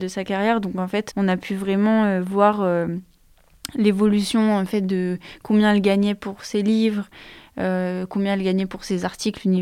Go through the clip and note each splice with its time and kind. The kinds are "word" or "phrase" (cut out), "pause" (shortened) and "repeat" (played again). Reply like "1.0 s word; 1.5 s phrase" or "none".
1.1 s word